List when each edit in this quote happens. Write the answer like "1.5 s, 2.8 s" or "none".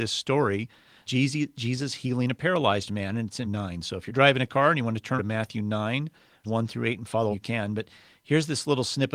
1.1 s, 3.4 s, 4.1 s, 5.2 s, 6.4 s, 7.3 s